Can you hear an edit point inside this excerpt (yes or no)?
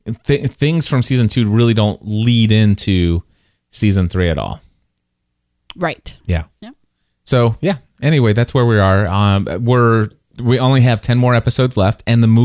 no